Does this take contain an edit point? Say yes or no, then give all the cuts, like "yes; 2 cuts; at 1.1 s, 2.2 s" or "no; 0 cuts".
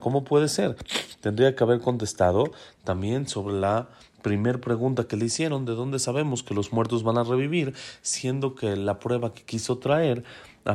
no; 0 cuts